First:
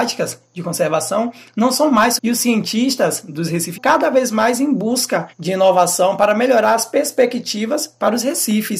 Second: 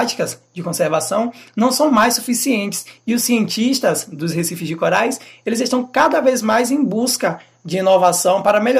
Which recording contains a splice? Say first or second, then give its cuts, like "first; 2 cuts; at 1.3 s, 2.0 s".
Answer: first; 3 cuts; at 2.2 s, 3.8 s, 5.3 s